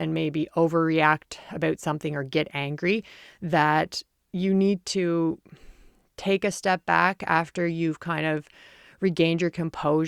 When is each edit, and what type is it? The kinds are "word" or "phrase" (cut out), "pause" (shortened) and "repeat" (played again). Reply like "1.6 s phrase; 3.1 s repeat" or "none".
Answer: none

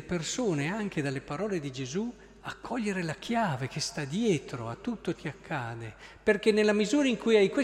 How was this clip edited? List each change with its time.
5.1 s word

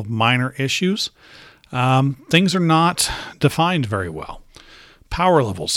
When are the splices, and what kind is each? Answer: none

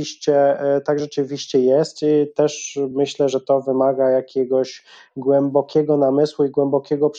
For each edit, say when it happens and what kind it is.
none

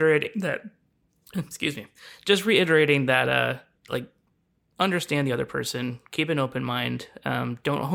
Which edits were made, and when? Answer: none

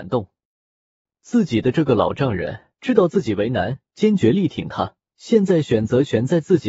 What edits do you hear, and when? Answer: 2.7 s pause; 3.9 s pause; 5.0 s pause

